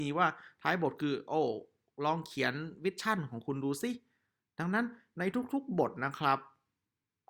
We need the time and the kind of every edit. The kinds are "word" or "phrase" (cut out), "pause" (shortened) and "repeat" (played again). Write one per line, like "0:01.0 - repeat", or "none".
none